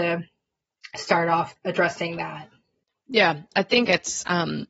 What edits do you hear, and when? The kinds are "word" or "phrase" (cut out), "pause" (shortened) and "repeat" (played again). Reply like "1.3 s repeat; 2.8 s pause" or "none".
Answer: 1.6 s word